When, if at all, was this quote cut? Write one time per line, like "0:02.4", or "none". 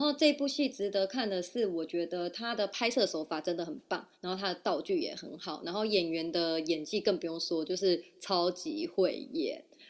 0:04.1

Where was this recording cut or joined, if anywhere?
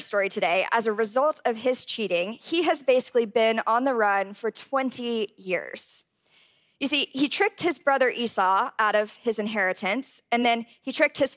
none

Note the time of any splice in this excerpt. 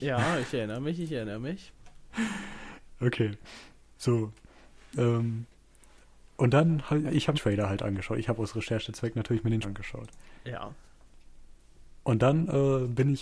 0:07.3
0:09.6

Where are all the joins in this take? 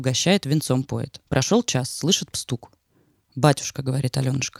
0:01.3
0:02.3

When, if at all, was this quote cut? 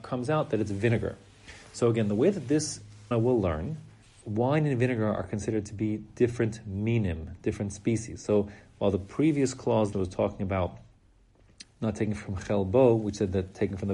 0:03.1
0:04.0
0:09.9
0:11.6

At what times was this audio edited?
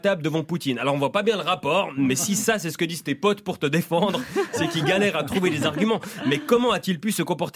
none

